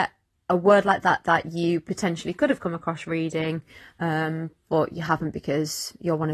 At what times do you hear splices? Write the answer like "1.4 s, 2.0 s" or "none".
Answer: none